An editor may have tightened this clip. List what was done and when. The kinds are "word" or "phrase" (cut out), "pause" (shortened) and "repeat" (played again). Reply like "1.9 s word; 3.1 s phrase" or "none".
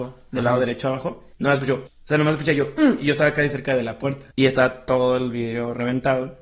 1.3 s pause; 1.9 s word; 4.3 s pause

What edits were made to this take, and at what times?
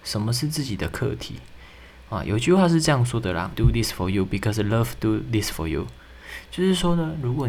3.5 s phrase

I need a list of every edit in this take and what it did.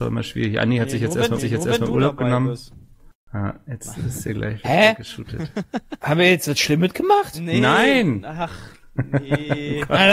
1.4 s repeat; 3.1 s pause

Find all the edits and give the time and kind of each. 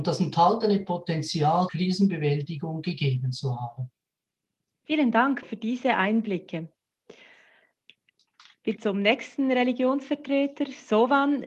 1.7 s word; 5.4 s word; 8.8 s word

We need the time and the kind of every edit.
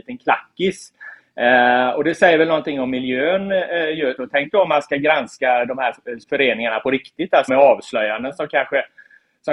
4.2 s word; 6.2 s pause; 7.5 s phrase

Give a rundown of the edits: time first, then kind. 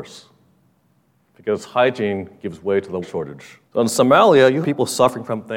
3.0 s word; 3.6 s pause; 4.6 s word

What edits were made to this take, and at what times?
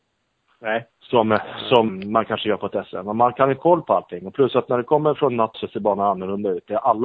0.9 s pause; 1.9 s word; 3.6 s word; 5.5 s phrase

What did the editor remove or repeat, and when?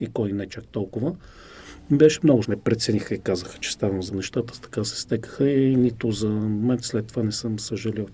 2.4 s phrase; 4.1 s phrase

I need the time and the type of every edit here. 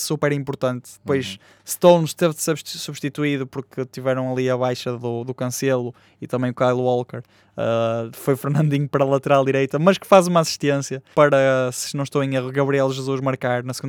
11.1 s word

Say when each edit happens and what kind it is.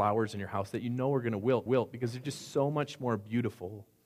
1.7 s repeat

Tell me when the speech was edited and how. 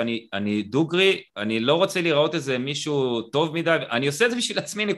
1.3 s pause

